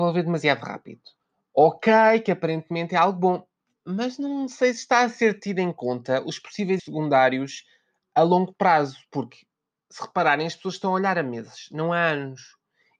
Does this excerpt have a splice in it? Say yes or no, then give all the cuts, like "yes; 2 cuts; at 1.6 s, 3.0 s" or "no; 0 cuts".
yes; 2 cuts; at 1.2 s, 6.8 s